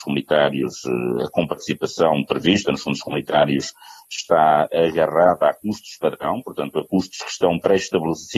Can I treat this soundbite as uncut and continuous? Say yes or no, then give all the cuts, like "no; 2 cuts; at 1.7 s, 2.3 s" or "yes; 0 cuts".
yes; 0 cuts